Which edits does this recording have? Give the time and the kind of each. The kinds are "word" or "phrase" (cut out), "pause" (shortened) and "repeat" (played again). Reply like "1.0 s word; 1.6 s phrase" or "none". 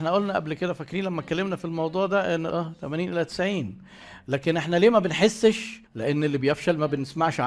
2.5 s word; 5.8 s pause